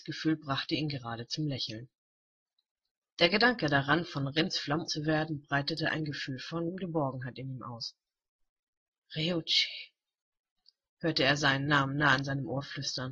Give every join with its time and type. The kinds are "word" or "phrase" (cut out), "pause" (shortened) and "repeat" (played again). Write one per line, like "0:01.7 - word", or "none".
0:04.8 - word